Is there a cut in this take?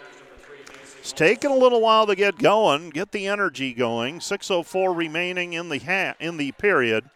no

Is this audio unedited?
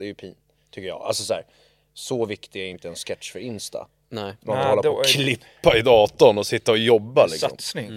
yes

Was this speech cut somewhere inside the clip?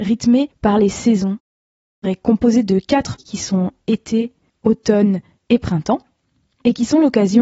yes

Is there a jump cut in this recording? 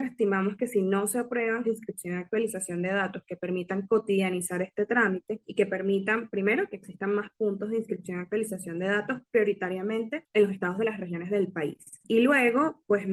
yes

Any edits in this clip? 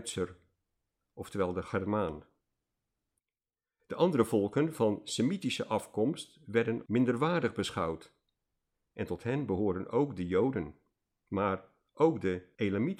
yes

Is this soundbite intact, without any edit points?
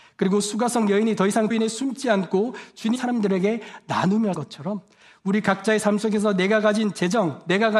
no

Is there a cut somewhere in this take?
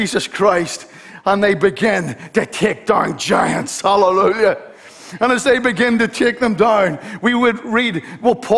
no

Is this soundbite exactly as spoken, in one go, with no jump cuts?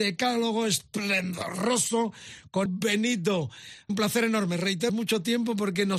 no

